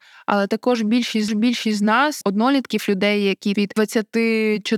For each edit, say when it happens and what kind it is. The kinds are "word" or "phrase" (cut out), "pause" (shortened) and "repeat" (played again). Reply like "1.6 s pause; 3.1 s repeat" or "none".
1.3 s repeat; 2.2 s phrase; 3.5 s phrase